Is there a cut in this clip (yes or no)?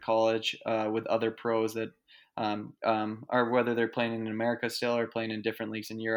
yes